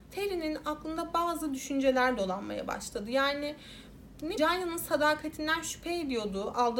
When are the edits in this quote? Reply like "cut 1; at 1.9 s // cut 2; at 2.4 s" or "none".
cut 1; at 4.4 s